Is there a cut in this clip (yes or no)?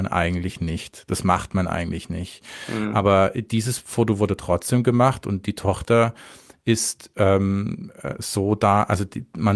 no